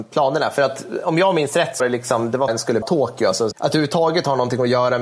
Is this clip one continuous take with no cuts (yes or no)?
no